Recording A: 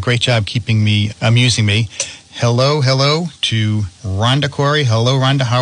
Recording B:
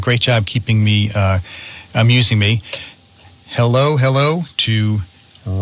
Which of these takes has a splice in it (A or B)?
A